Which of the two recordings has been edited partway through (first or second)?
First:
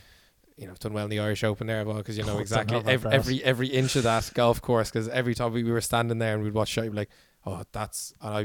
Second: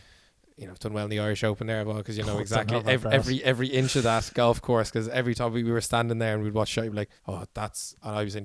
second